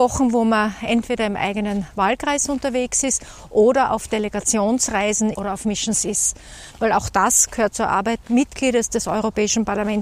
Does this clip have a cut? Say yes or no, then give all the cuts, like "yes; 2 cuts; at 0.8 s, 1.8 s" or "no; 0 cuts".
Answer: yes; 2 cuts; at 5.3 s, 8.2 s